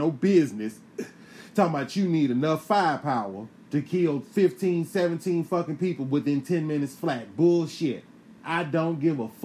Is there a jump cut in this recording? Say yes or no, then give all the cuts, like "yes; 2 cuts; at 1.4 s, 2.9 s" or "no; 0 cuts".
yes; 1 cut; at 8.4 s